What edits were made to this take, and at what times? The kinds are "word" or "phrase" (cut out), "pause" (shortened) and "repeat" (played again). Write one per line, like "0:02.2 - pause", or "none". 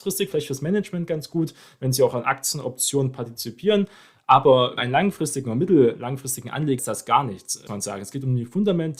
0:04.8 - word
0:06.8 - word
0:07.7 - word